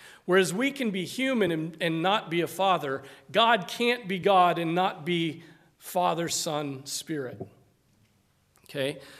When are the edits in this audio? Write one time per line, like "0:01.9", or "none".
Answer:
none